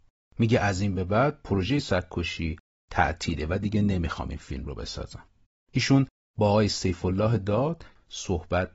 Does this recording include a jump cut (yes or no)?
no